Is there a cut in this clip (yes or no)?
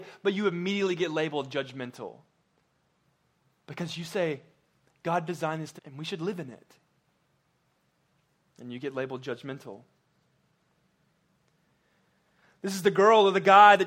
yes